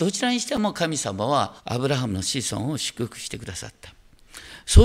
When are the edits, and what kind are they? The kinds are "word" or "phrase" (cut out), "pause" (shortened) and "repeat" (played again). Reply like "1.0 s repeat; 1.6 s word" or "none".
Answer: 1.6 s pause